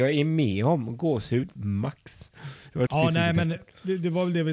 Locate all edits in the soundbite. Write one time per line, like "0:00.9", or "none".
0:01.6
0:02.9